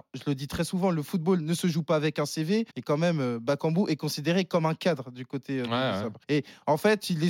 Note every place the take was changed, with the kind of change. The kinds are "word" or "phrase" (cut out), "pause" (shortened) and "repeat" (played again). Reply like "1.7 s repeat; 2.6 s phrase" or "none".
2.7 s pause; 6.2 s pause